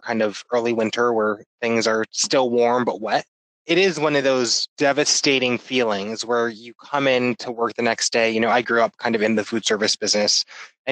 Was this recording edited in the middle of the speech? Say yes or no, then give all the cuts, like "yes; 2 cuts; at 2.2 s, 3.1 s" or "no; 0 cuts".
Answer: no; 0 cuts